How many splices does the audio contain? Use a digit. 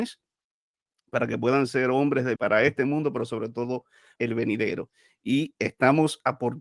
2